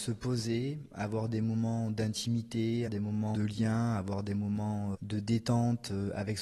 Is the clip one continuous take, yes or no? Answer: no